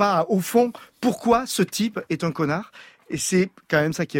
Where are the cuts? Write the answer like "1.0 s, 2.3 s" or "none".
none